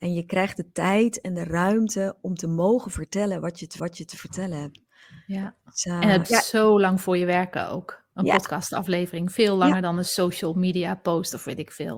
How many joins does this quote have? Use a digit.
2